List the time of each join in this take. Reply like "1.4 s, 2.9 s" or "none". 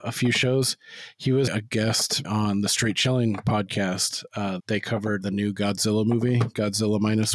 1.5 s, 2.2 s, 4.6 s, 5.2 s